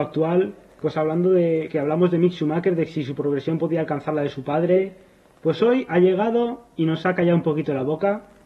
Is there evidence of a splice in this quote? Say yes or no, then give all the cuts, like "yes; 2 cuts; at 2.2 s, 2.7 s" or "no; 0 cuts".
no; 0 cuts